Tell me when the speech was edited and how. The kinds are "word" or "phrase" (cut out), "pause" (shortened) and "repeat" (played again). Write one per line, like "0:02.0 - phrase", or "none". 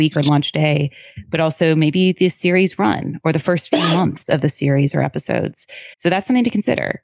0:05.9 - pause